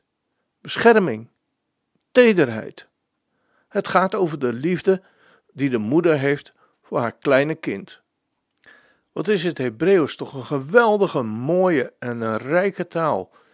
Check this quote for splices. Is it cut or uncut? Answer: uncut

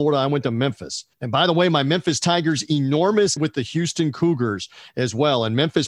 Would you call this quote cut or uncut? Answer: cut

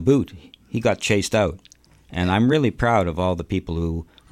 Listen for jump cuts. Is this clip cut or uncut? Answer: uncut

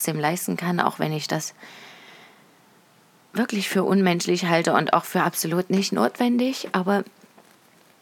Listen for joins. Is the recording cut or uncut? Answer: uncut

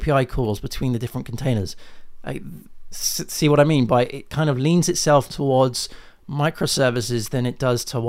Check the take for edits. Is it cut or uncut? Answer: cut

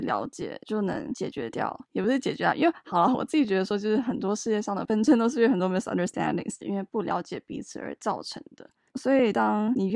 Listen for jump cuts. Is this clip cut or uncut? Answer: uncut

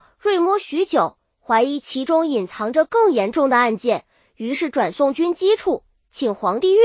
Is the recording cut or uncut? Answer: uncut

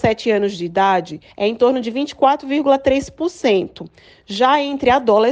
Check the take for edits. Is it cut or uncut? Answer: cut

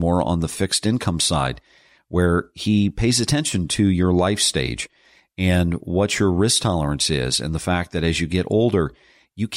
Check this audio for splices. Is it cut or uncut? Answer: uncut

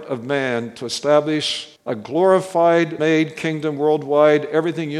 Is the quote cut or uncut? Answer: cut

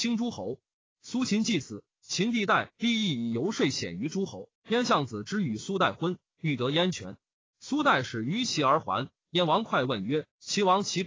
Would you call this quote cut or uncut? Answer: cut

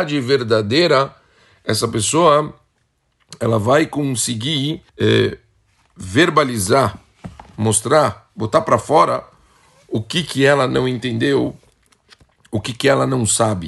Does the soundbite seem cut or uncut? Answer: cut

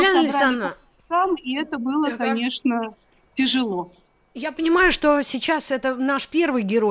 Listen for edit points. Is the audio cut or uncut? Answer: uncut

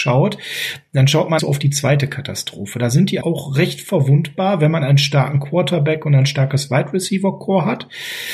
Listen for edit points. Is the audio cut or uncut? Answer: cut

